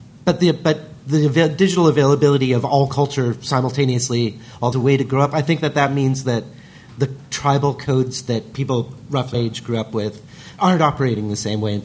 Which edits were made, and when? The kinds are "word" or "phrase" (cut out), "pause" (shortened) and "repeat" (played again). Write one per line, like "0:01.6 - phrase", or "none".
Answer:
0:04.7 - phrase
0:09.3 - word
0:10.6 - word

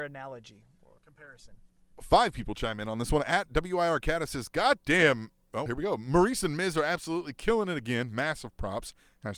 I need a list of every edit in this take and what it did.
0:01.0 - pause
0:05.7 - word

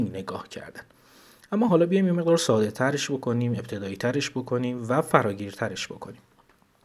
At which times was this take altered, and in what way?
none

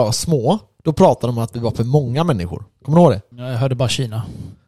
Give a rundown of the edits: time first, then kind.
0:03.3 - pause

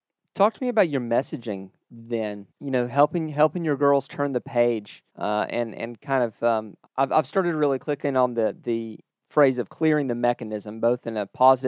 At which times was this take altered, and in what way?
0:02.5 - pause
0:05.1 - pause
0:06.9 - pause
0:09.1 - pause

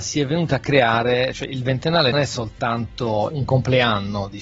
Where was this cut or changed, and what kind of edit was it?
0:02.1 - word
0:03.3 - word

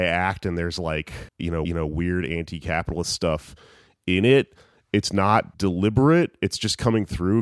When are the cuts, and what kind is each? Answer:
0:01.3 - pause
0:01.6 - repeat
0:05.5 - pause

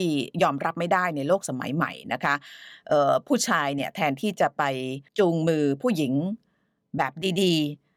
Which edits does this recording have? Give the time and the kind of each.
0:05.1 - pause

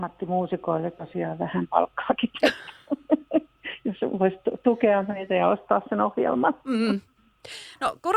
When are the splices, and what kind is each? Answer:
none

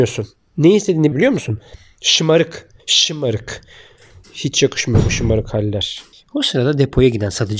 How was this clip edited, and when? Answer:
0:01.1 - phrase
0:02.8 - pause
0:06.1 - pause

